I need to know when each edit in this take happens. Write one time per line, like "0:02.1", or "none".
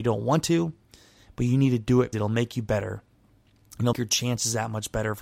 0:02.1
0:03.9

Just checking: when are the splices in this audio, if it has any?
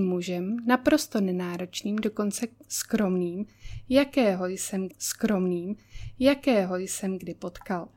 0:04.9

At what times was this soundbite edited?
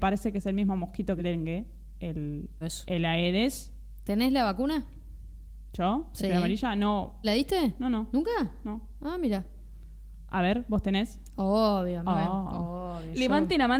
0:01.2
0:02.6
0:07.2

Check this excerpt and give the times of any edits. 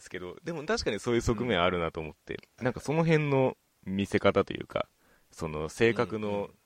none

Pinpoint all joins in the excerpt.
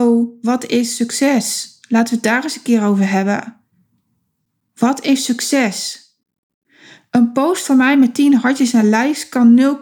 none

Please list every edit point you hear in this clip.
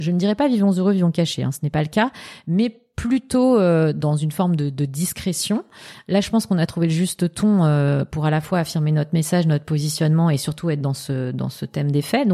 none

